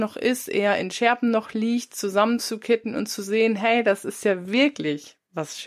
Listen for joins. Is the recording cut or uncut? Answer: uncut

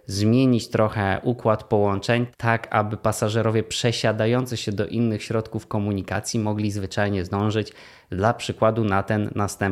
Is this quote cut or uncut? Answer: uncut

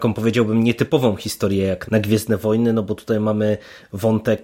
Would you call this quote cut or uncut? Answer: cut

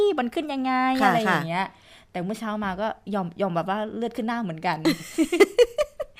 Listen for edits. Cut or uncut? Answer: uncut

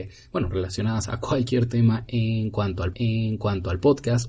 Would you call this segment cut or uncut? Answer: cut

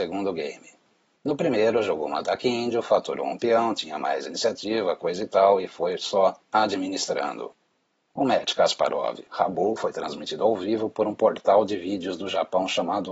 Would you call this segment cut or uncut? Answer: uncut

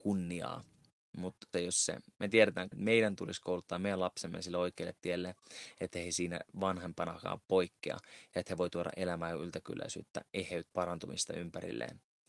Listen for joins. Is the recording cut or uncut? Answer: cut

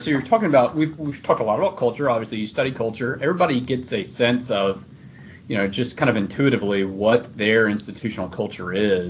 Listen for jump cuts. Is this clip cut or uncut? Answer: uncut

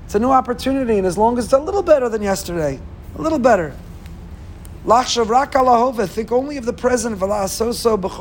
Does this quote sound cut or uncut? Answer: uncut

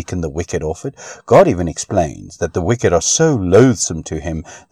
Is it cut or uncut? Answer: uncut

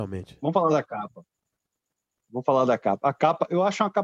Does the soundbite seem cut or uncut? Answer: uncut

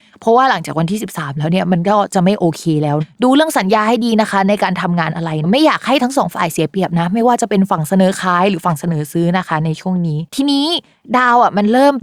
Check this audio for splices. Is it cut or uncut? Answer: cut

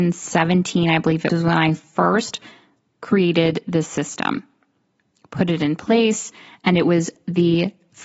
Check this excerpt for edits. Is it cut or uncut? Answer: cut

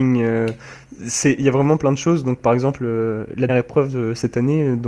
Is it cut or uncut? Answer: cut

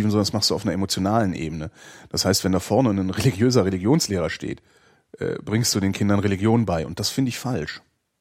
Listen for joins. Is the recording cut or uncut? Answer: uncut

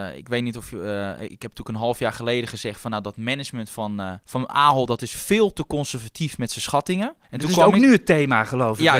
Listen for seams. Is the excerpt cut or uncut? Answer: cut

